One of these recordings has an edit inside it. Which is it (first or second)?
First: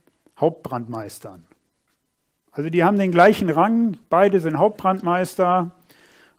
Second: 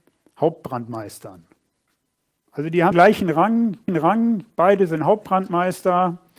second